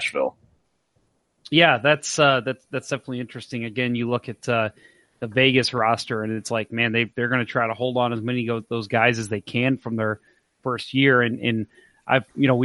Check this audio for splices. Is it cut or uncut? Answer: uncut